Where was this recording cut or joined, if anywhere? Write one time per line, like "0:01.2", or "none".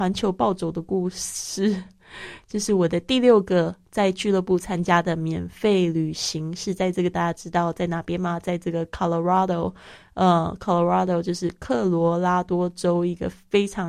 0:07.1